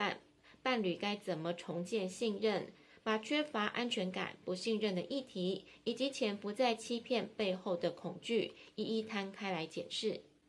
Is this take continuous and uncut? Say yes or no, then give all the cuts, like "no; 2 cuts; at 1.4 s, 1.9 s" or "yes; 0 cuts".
yes; 0 cuts